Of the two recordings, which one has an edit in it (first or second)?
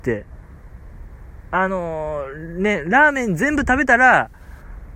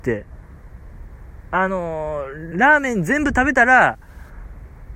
second